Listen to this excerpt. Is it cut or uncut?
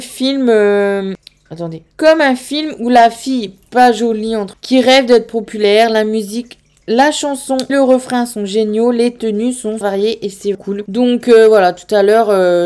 cut